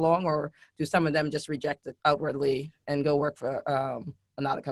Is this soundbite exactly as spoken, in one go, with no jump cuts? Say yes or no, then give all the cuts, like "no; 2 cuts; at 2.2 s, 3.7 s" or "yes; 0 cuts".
no; 1 cut; at 2.0 s